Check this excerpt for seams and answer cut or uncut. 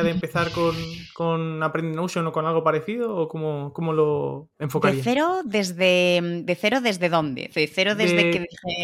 uncut